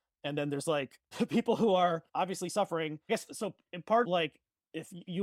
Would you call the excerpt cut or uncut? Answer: cut